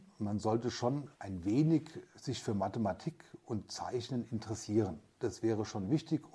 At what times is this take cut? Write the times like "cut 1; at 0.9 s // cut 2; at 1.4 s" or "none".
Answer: cut 1; at 1.1 s